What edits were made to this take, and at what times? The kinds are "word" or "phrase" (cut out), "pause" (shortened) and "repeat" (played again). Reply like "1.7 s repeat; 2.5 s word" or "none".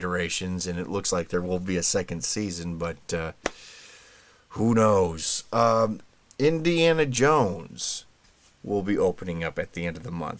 none